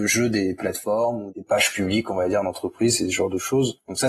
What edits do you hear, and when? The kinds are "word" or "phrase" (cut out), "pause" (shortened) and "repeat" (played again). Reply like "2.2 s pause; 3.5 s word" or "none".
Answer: none